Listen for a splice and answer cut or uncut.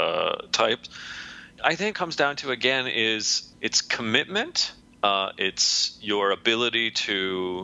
cut